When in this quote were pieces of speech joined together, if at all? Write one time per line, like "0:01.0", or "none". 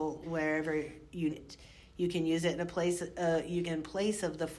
0:01.3
0:03.6

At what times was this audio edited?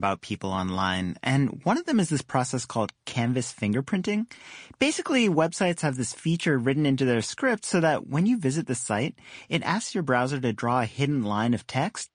none

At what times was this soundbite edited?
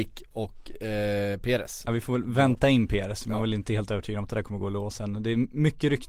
none

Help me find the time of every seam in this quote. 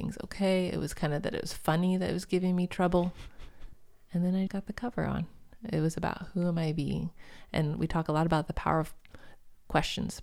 0:04.5

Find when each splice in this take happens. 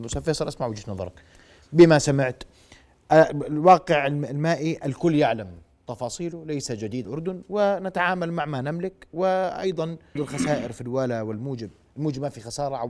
0:07.0
0:10.2

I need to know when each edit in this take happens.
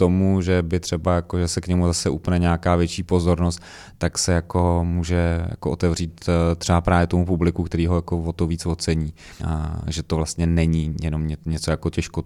0:09.4

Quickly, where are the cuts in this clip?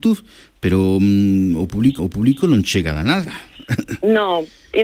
0:02.0

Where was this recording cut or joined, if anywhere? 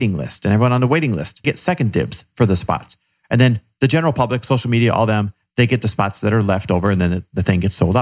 0:01.4

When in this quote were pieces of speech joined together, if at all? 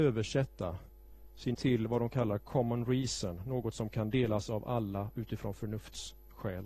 0:01.5

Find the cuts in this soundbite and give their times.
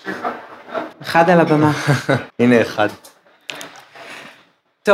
0:00.9
0:02.3

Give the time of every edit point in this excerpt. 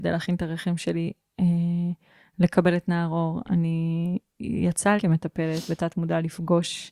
0:05.0

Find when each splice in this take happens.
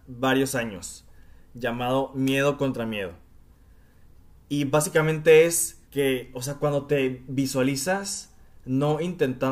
0:05.8

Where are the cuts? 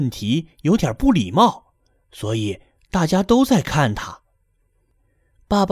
none

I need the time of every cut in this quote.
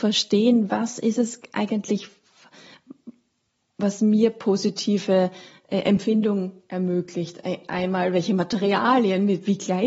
none

